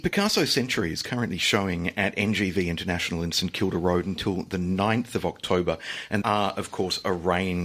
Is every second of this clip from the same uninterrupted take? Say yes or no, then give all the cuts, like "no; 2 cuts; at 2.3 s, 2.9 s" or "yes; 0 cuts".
no; 1 cut; at 6.2 s